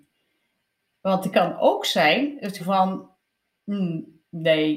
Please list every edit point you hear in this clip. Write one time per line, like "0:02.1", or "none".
0:01.3
0:02.6